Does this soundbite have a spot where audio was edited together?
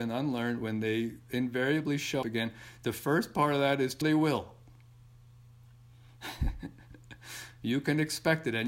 yes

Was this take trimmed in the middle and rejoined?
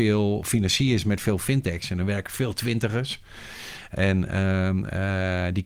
no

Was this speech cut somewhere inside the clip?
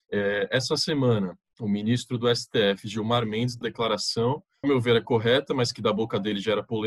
yes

